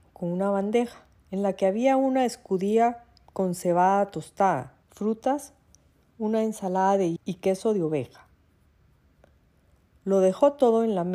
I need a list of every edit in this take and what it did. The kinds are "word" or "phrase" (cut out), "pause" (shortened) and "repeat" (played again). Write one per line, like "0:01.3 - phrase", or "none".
0:03.3 - pause
0:04.8 - pause
0:07.2 - word